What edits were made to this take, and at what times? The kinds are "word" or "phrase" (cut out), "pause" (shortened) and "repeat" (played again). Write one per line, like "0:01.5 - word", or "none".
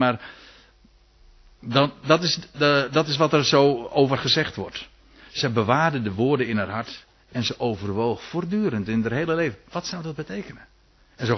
0:04.2 - word